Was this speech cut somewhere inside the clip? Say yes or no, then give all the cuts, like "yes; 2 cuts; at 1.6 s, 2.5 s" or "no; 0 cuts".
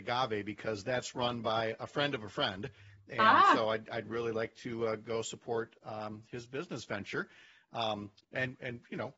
no; 0 cuts